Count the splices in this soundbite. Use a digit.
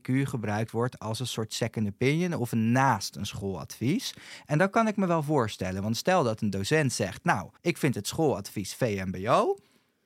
1